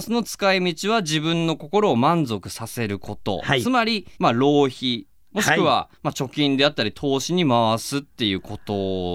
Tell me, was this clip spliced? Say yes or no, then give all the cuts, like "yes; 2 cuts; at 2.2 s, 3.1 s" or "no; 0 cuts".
yes; 2 cuts; at 4.1 s, 5.9 s